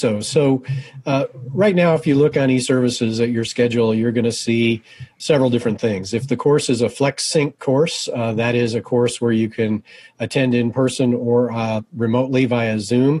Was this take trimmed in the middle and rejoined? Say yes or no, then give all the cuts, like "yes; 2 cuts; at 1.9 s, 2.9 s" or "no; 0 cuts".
no; 0 cuts